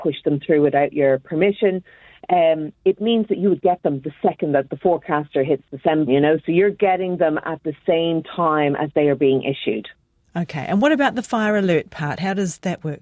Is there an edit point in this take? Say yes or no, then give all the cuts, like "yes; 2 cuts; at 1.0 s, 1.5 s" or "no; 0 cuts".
yes; 1 cut; at 6.1 s